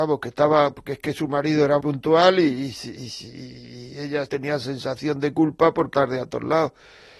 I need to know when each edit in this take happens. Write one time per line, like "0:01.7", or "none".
0:01.8
0:04.3
0:05.9